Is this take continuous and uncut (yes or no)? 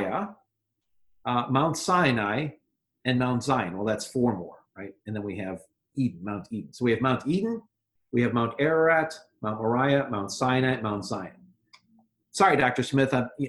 yes